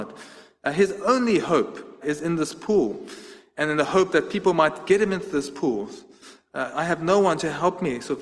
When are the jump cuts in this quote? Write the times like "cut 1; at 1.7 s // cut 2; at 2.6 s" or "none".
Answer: cut 1; at 2.0 s